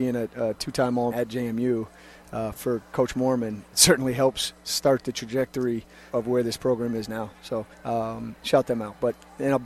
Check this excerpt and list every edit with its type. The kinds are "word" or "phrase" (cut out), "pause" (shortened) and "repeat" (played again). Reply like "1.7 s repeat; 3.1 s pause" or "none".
1.1 s word; 2.5 s word; 3.7 s word; 6.1 s word; 7.7 s pause